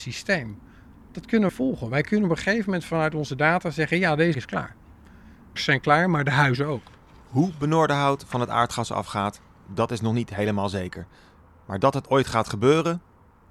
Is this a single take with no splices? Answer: no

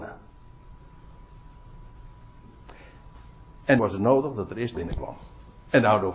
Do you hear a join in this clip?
yes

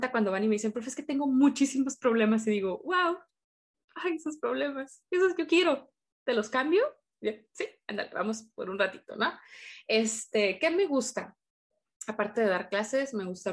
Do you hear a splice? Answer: no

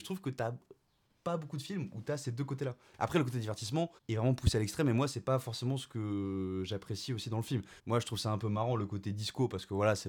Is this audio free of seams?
no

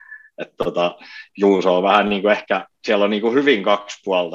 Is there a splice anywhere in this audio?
yes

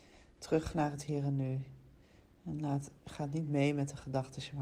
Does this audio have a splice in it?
no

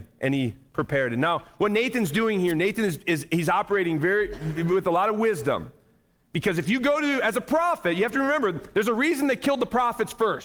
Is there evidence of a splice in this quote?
no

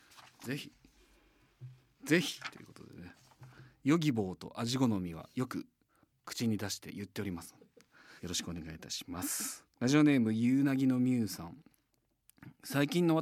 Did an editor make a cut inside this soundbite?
yes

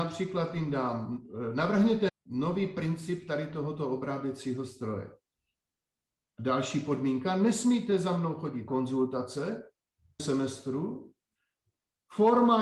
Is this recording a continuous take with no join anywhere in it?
no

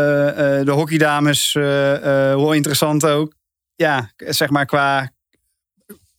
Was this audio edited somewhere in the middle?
no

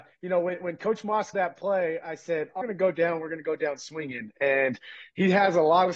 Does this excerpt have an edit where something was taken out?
yes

